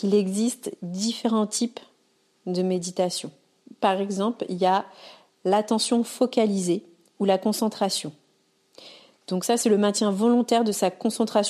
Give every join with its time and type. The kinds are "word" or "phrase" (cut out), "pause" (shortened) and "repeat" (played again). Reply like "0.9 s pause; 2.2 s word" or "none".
none

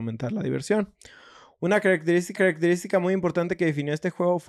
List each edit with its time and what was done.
2.4 s repeat

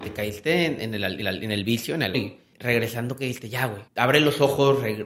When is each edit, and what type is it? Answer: 1.2 s repeat; 2.1 s word; 2.5 s pause; 3.9 s pause

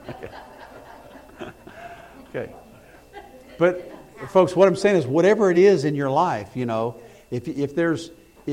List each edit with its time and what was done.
none

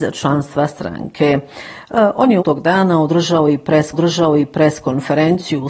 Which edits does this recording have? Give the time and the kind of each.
2.4 s word; 3.9 s repeat

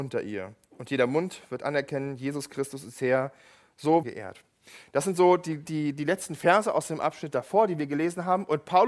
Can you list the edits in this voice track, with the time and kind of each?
4.0 s phrase

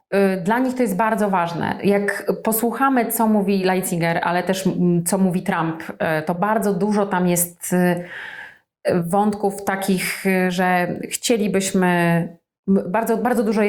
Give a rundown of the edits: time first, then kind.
none

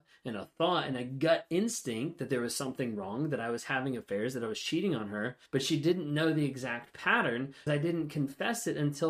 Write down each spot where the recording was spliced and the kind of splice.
5.5 s pause; 7.7 s word

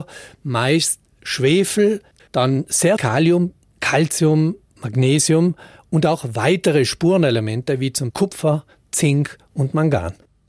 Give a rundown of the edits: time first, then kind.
2.2 s word; 3.0 s word; 8.1 s word

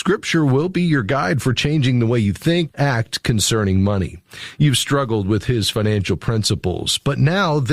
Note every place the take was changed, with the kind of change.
2.7 s word

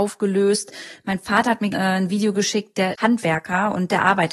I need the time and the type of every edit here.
1.7 s word; 2.9 s word

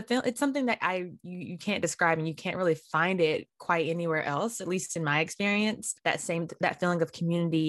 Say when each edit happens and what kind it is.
6.0 s pause

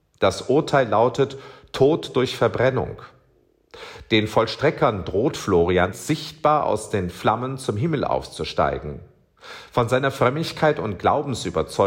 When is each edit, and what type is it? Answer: 5.9 s word

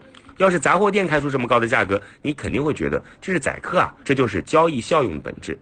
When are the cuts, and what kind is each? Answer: 4.0 s pause

